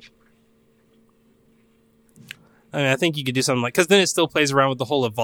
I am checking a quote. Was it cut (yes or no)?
no